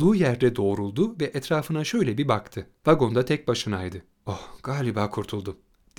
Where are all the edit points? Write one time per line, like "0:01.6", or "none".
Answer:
0:02.8
0:04.1